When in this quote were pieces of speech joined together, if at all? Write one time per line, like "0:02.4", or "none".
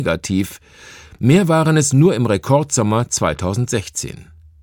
none